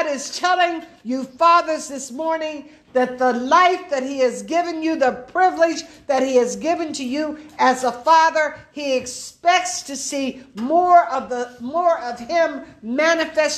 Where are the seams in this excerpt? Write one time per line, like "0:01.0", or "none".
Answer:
none